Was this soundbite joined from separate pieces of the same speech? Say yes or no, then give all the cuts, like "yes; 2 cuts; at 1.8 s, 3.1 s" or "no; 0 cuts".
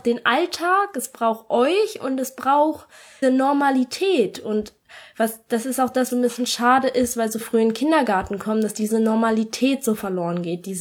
yes; 3 cuts; at 3.2 s, 6.1 s, 7.4 s